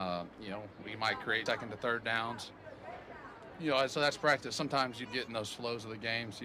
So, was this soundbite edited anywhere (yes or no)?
yes